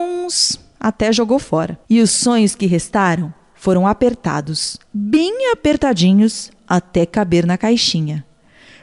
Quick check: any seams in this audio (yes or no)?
yes